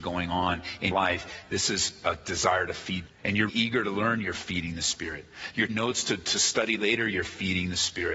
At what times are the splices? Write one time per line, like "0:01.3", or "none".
0:00.9
0:03.1
0:03.5
0:05.7